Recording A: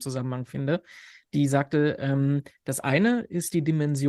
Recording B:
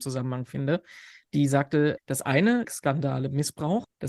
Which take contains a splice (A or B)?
B